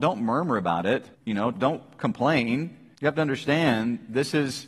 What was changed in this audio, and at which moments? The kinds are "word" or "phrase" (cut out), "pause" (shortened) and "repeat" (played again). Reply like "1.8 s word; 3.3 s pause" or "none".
1.1 s pause; 1.5 s word; 2.9 s pause